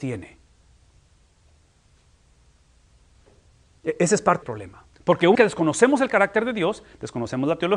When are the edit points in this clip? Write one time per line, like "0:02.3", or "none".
0:04.4
0:04.9
0:05.3